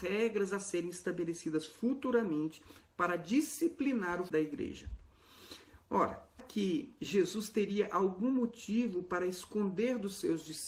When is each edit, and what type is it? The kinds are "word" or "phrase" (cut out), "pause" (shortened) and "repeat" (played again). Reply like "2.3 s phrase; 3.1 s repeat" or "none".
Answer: 4.3 s word; 6.4 s word; 7.0 s pause